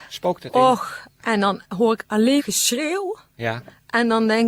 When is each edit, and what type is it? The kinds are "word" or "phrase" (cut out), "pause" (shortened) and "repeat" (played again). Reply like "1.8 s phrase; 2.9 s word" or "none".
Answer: 2.4 s word